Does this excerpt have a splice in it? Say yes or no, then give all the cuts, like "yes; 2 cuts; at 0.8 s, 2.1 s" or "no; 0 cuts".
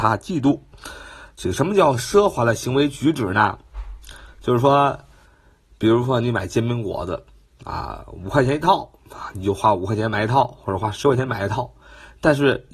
no; 0 cuts